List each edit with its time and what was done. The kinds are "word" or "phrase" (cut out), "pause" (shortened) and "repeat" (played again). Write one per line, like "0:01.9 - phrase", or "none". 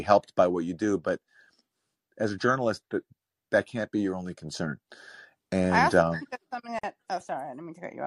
none

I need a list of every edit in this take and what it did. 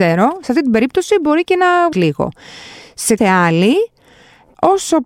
0:01.9 - word
0:03.2 - word

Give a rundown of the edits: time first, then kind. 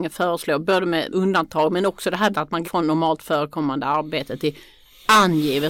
0:01.1 - word
0:02.3 - word
0:02.6 - word

